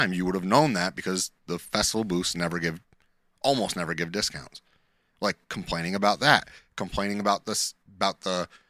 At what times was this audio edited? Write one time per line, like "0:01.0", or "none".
none